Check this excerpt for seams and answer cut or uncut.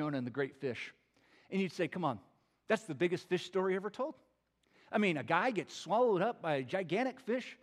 uncut